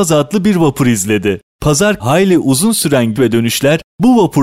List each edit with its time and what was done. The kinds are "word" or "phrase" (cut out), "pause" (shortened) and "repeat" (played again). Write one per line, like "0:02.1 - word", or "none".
0:02.0 - word
0:03.2 - word